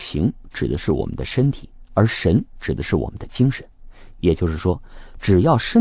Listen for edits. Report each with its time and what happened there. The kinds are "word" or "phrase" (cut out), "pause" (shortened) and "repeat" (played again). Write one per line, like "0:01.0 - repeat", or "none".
none